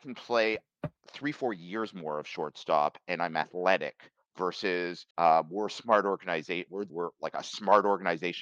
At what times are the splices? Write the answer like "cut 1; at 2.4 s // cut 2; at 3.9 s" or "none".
cut 1; at 1.0 s // cut 2; at 5.1 s // cut 3; at 6.9 s